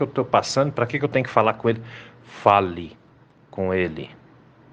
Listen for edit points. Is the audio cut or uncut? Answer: uncut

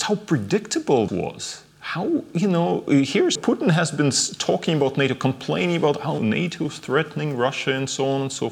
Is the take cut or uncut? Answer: cut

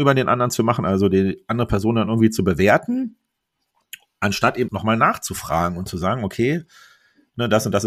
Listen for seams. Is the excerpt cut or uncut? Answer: cut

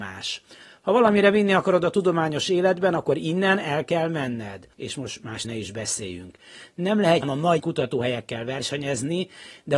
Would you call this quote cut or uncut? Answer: cut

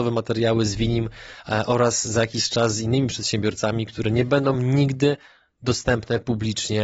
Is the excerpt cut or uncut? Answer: uncut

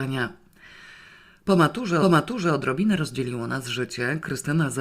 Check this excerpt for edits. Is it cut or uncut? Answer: cut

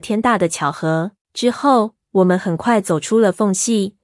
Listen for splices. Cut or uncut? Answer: cut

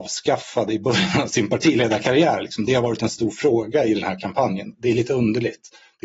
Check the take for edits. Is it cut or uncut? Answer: uncut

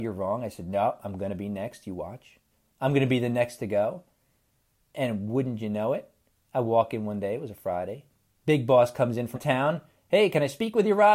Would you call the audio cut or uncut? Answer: cut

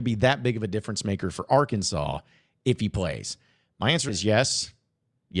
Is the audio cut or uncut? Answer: cut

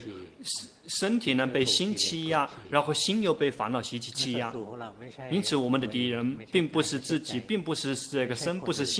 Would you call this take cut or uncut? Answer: uncut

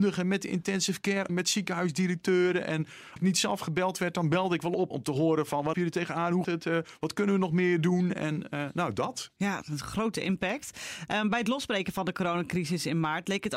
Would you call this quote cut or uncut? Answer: cut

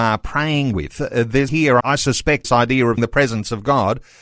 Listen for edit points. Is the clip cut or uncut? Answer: cut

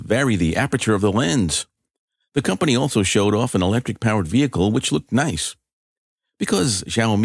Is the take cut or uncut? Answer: uncut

